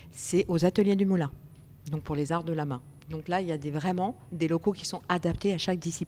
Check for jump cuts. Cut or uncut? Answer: uncut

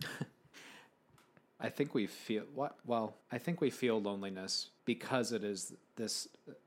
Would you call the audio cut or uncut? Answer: cut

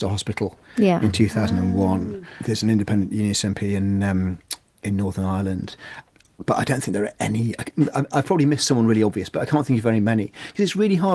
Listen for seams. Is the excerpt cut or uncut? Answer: uncut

